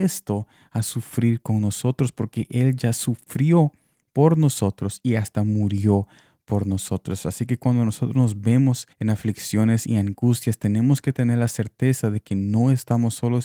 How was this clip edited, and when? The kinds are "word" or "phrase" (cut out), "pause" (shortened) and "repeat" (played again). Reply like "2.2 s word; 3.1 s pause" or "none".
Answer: 8.9 s pause